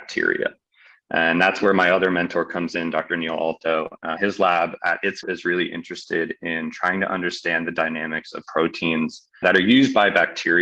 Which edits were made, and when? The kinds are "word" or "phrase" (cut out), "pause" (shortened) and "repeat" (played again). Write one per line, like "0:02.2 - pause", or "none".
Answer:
0:04.2 - word
0:05.2 - word
0:08.4 - word
0:09.4 - word